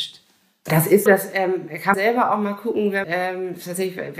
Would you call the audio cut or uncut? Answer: cut